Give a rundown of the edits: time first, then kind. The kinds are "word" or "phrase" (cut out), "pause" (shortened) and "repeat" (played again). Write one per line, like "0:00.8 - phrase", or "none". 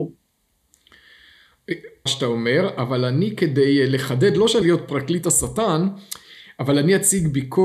0:02.1 - phrase
0:04.6 - word